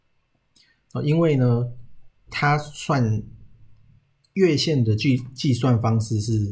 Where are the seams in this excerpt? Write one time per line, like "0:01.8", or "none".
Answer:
0:02.3